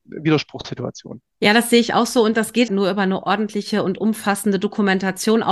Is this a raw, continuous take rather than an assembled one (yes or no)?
no